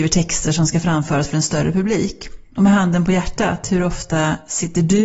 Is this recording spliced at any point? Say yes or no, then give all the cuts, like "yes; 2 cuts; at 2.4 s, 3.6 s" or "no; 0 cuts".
no; 0 cuts